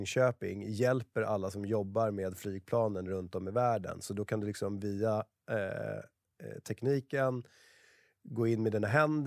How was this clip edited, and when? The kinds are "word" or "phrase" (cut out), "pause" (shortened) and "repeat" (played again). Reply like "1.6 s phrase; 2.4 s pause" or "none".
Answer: none

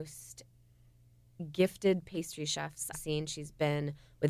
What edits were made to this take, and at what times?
2.9 s phrase

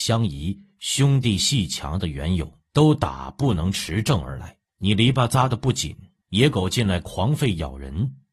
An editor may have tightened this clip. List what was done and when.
2.7 s pause; 4.7 s pause; 6.2 s pause

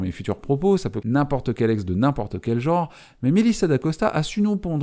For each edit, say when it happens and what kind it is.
1.0 s word

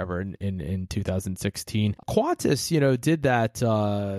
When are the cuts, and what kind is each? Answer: none

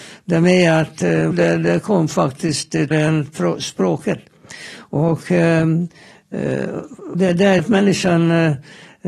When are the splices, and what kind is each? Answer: 1.3 s word; 2.9 s word; 7.1 s word; 7.6 s word

